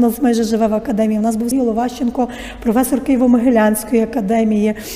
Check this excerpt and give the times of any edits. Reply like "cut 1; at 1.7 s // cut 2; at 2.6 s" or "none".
cut 1; at 1.5 s